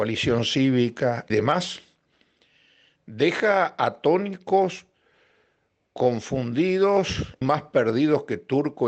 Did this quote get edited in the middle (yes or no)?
yes